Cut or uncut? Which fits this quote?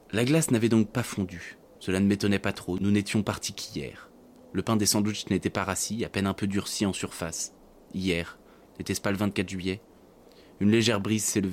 uncut